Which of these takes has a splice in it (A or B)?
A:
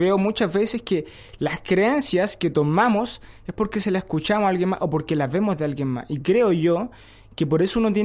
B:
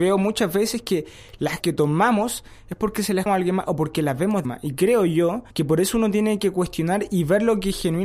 B